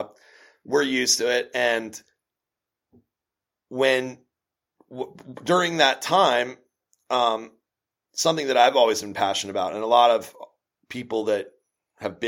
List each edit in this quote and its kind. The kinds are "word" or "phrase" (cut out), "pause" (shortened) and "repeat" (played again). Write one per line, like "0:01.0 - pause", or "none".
none